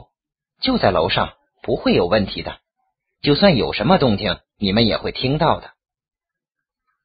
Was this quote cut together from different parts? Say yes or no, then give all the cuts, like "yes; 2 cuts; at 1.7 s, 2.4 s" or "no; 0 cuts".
no; 0 cuts